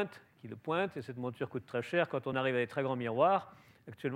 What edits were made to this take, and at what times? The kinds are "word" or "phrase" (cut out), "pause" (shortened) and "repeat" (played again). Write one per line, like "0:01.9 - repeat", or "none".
none